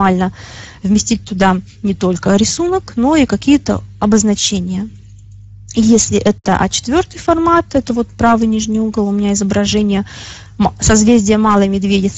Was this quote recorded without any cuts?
yes; 0 cuts

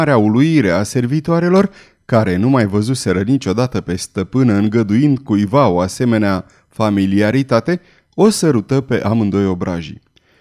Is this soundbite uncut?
yes; 0 cuts

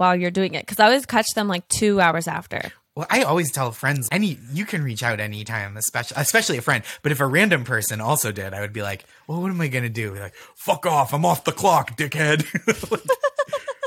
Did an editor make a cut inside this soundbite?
yes; 1 cut; at 4.1 s

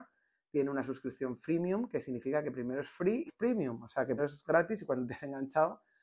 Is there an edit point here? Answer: yes; 2 cuts; at 3.3 s, 4.2 s

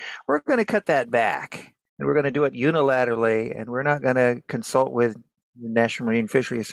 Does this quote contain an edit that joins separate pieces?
no; 0 cuts

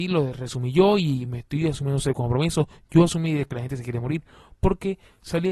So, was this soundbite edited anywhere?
no; 0 cuts

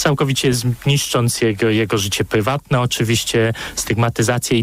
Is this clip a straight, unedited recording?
yes; 0 cuts

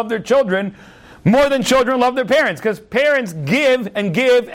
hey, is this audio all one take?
yes; 0 cuts

